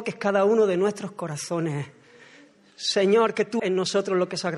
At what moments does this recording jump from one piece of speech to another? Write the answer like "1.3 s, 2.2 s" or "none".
3.6 s